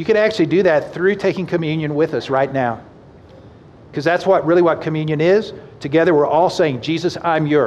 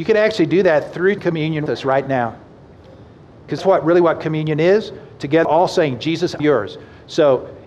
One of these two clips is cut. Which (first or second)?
second